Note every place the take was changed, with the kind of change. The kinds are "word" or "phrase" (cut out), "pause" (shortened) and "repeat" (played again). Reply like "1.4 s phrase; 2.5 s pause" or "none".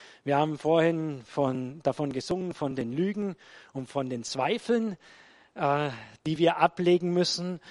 none